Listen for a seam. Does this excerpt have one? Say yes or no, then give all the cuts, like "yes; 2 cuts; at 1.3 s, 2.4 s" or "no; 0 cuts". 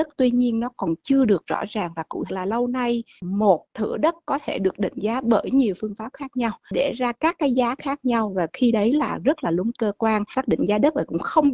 yes; 2 cuts; at 2.3 s, 9.7 s